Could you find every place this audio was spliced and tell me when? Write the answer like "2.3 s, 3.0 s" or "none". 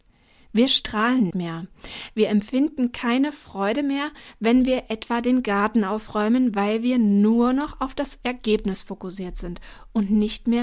1.3 s